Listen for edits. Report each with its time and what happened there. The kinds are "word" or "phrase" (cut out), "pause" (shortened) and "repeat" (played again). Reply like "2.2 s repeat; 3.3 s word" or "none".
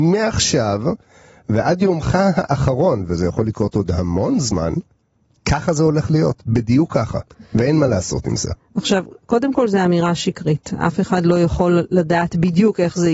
none